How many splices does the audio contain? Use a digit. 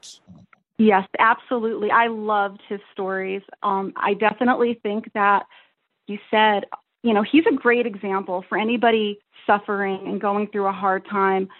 1